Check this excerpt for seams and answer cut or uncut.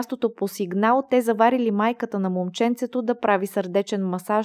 uncut